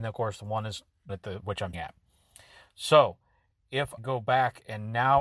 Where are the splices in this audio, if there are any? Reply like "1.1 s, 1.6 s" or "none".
1.1 s, 1.4 s, 1.7 s, 4.0 s